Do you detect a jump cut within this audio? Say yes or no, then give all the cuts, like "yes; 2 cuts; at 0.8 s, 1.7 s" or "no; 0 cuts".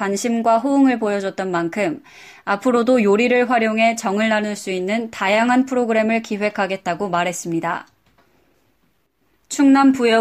no; 0 cuts